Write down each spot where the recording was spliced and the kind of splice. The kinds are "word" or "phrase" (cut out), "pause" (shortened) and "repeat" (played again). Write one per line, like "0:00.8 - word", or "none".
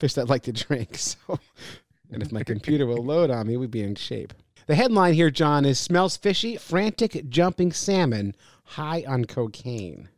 0:04.0 - word
0:06.6 - word